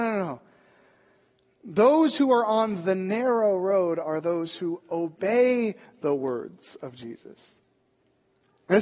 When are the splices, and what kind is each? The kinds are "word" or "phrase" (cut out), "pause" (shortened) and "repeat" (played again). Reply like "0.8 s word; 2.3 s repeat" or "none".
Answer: none